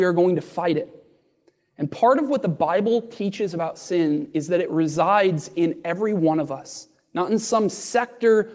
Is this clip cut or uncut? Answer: uncut